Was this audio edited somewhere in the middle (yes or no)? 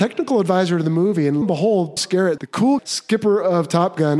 yes